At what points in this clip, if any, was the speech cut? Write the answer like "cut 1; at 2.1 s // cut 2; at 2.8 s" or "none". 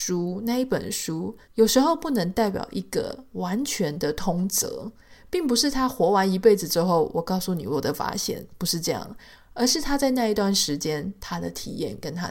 cut 1; at 1.4 s